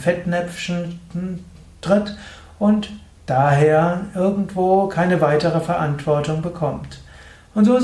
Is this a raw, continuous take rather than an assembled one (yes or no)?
yes